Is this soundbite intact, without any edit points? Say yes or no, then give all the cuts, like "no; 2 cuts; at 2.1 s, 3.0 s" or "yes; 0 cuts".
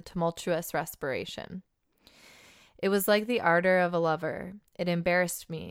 yes; 0 cuts